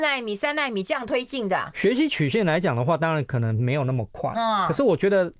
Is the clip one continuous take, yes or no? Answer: yes